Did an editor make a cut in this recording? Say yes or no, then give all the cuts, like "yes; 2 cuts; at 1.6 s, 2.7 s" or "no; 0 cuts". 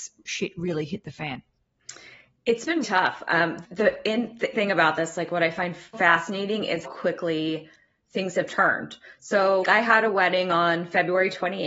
yes; 6 cuts; at 2.8 s, 3.6 s, 4.5 s, 5.9 s, 6.8 s, 9.6 s